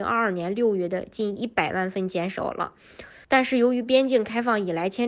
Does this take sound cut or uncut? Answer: cut